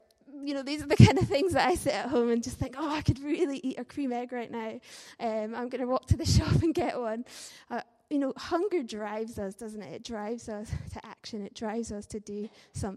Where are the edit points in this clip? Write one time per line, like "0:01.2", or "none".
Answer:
none